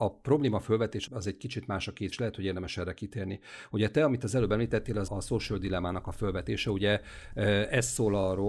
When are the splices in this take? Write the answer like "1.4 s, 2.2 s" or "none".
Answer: 1.1 s, 2.1 s, 5.1 s